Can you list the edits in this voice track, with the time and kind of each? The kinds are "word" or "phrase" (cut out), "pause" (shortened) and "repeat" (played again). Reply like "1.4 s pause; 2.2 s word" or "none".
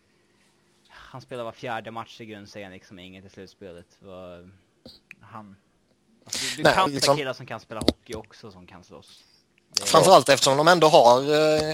6.9 s word